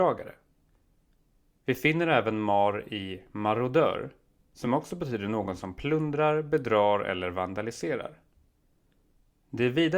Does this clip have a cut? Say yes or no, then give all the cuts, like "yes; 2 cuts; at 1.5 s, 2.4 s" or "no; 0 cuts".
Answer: no; 0 cuts